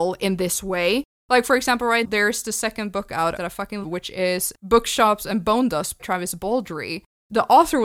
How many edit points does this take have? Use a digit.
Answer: 4